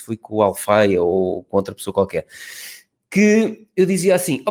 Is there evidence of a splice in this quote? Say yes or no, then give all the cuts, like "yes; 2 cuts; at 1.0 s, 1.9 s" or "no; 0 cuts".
no; 0 cuts